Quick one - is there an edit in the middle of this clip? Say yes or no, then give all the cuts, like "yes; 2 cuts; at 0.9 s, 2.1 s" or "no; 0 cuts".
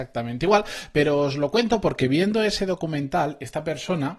no; 0 cuts